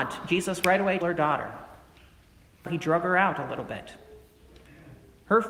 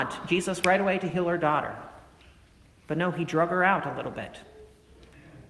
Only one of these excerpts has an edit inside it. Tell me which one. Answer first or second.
first